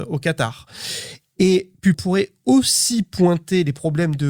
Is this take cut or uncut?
cut